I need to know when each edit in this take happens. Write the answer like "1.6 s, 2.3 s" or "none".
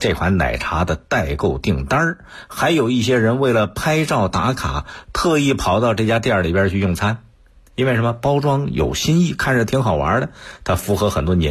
none